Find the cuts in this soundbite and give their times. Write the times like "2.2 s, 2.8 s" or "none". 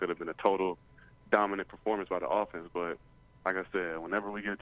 none